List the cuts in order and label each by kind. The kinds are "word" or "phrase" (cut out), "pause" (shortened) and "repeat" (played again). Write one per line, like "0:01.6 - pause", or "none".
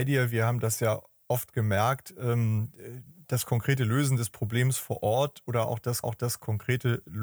0:06.0 - repeat